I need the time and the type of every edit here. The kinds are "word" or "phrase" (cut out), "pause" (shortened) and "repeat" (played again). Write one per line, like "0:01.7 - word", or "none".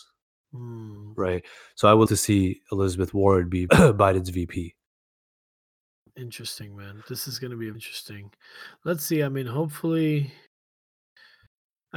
0:02.1 - word
0:03.7 - word
0:07.7 - word